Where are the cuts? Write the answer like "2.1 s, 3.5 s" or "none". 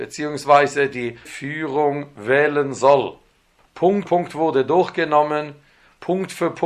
1.2 s, 4.0 s

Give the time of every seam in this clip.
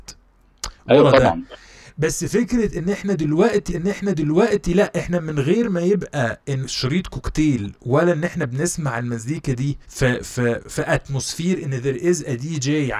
3.7 s, 6.6 s, 9.8 s, 10.6 s

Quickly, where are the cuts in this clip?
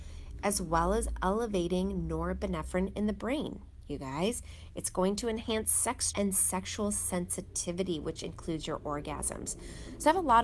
6.1 s

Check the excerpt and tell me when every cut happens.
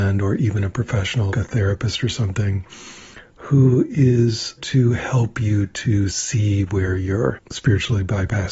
1.3 s, 4.6 s

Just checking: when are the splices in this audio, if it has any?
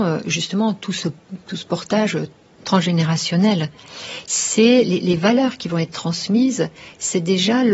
none

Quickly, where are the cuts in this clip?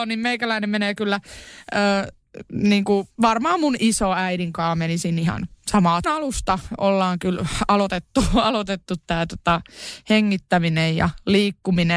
3.1 s, 6.0 s

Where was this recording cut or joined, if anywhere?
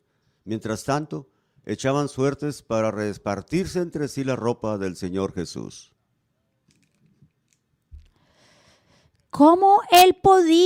none

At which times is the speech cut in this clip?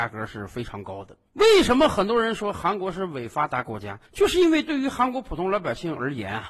4.0 s

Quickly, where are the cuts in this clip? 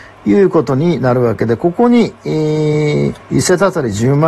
3.2 s

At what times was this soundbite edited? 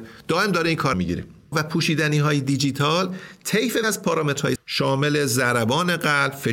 0.9 s, 1.5 s, 3.8 s, 4.6 s

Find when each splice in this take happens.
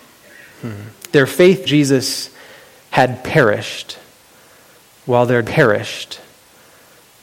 1.6 s, 5.4 s

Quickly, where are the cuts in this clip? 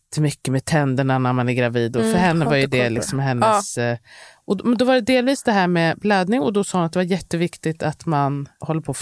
none

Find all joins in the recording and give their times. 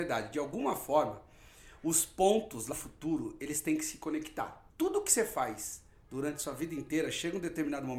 2.7 s, 4.7 s

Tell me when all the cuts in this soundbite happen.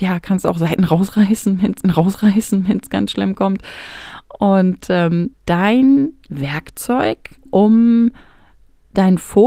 1.8 s, 5.3 s, 7.4 s

